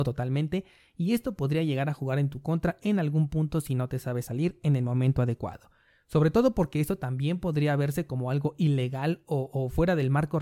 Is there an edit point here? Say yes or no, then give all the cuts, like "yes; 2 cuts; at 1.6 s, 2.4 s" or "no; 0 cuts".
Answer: no; 0 cuts